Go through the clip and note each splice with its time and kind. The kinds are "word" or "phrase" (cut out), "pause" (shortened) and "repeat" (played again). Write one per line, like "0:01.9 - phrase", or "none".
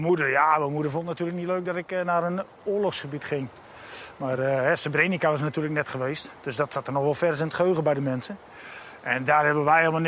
none